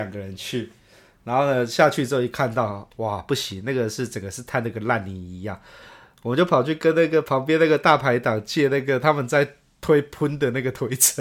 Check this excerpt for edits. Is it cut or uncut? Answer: uncut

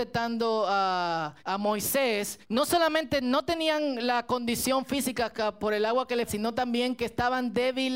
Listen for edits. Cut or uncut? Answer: cut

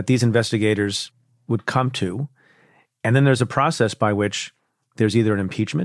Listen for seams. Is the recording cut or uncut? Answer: uncut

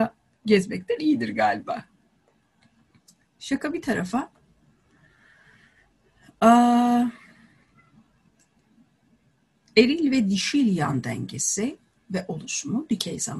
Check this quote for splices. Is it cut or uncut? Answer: uncut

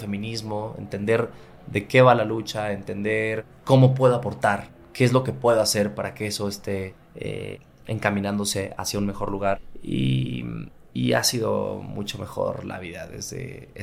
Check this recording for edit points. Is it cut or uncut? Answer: uncut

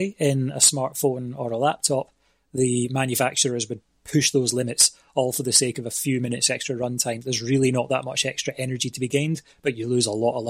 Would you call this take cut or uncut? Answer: uncut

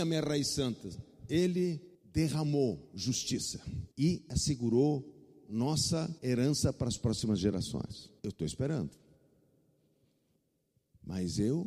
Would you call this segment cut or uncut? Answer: cut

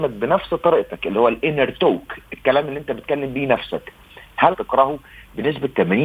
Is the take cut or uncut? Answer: cut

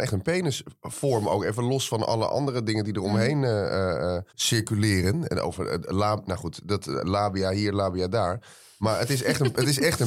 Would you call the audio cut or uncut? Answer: cut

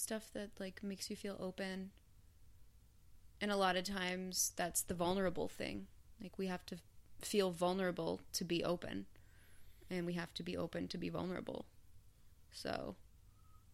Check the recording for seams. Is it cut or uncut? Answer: uncut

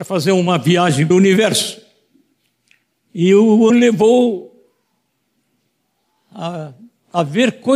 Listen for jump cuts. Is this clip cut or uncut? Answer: cut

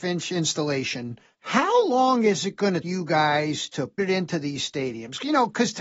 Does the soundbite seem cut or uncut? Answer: cut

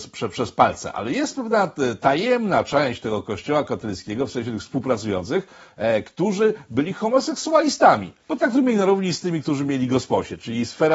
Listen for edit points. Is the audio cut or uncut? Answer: cut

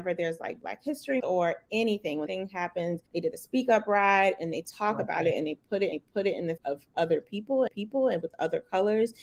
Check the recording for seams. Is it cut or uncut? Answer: cut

